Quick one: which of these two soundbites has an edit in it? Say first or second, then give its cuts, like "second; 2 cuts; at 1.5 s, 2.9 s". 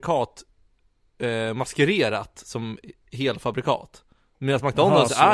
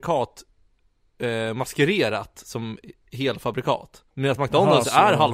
second; 1 cut; at 4.1 s